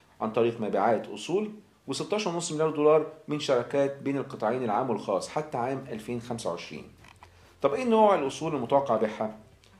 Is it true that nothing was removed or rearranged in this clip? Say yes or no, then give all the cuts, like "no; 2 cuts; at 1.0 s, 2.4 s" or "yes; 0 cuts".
yes; 0 cuts